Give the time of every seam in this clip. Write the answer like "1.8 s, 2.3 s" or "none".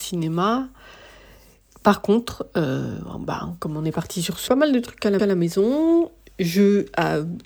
4.5 s, 5.2 s